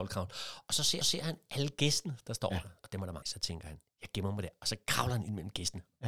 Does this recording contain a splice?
yes; 3 cuts; at 1.0 s, 2.8 s, 3.2 s

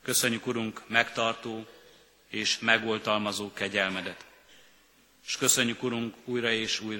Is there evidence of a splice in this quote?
no; 0 cuts

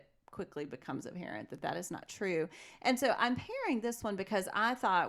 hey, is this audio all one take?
yes; 0 cuts

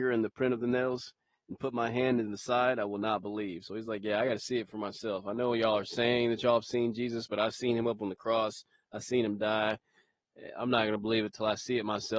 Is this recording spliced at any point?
no; 0 cuts

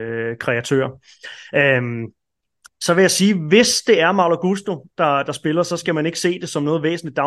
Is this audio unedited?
yes; 0 cuts

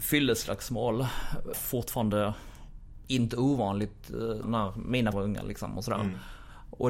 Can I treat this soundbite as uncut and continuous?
no; 3 cuts; at 1.5 s, 4.4 s, 5.1 s

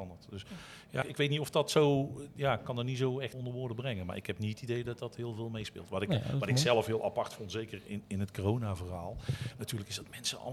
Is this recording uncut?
no; 2 cuts; at 1.0 s, 3.3 s

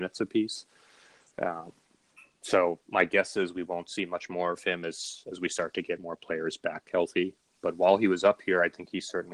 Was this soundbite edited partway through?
no; 0 cuts

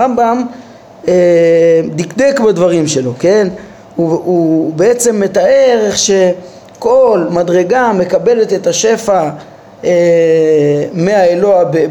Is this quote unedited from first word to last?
yes; 0 cuts

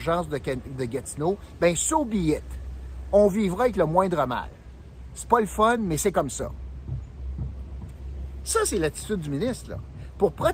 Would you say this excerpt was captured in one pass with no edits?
yes; 0 cuts

